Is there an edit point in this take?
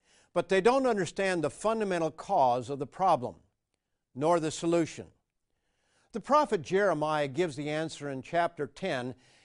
no; 0 cuts

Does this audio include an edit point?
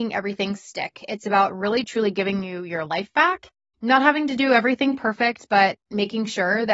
no; 0 cuts

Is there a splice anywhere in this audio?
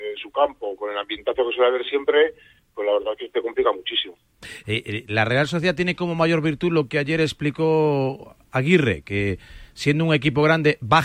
no; 0 cuts

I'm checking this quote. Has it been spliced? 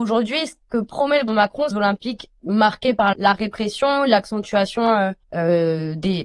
yes; 4 cuts; at 1.3 s, 1.7 s, 3.1 s, 5.2 s

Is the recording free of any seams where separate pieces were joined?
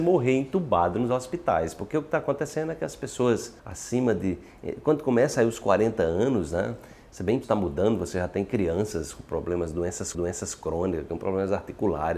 no; 3 cuts; at 3.6 s, 7.4 s, 10.1 s

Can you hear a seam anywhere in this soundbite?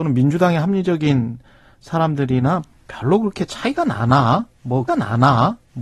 yes; 1 cut; at 4.9 s

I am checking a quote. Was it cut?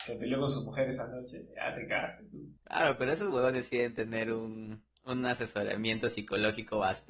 yes; 2 cuts; at 2.6 s, 5.0 s

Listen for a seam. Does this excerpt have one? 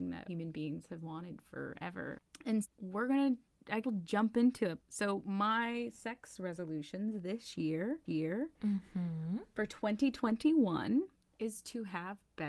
yes; 4 cuts; at 2.6 s, 3.8 s, 8.1 s, 11.1 s

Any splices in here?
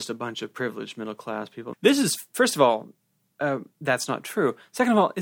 yes; 1 cut; at 1.7 s

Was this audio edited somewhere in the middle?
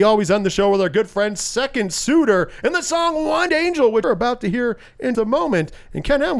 yes; 3 cuts; at 3.5 s, 4.0 s, 5.1 s

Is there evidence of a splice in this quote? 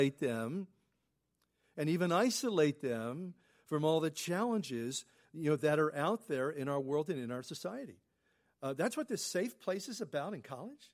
no; 0 cuts

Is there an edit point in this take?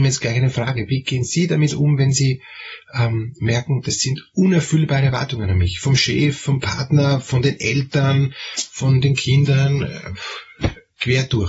no; 0 cuts

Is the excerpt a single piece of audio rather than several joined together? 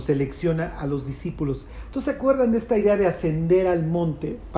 yes; 0 cuts

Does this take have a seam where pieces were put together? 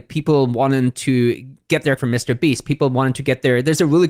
yes; 1 cut; at 2.0 s

